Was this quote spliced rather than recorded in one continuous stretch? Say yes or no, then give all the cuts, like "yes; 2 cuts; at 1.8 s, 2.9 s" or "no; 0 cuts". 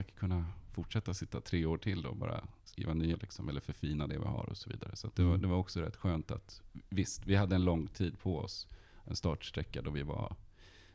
yes; 2 cuts; at 2.6 s, 3.1 s